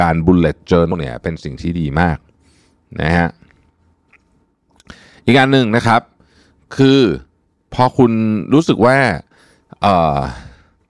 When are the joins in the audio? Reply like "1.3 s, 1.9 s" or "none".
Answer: 0.9 s